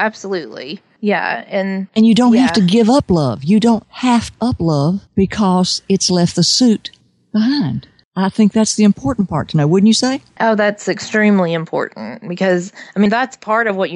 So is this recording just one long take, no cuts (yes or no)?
no